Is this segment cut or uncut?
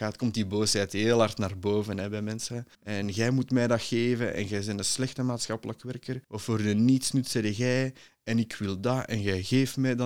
cut